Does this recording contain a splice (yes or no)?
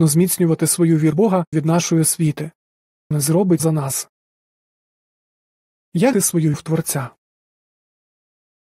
yes